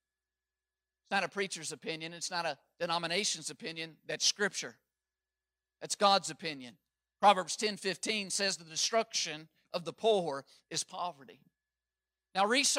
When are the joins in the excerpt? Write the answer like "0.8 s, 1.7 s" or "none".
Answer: none

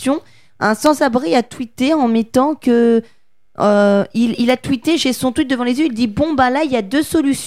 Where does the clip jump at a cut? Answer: none

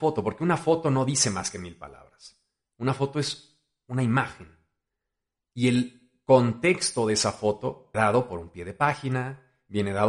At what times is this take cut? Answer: 7.9 s

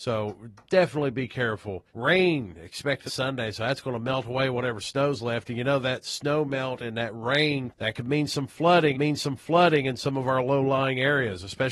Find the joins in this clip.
1.9 s, 3.1 s, 7.7 s, 8.9 s

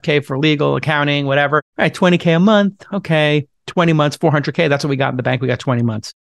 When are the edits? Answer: 1.7 s

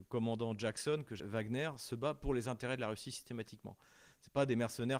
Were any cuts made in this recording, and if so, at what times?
1.2 s

